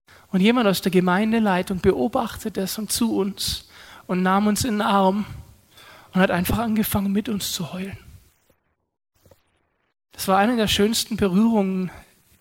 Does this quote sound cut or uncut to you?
cut